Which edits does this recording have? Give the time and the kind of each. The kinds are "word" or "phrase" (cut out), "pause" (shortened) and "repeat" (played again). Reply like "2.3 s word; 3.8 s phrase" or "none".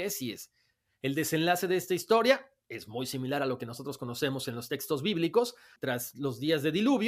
none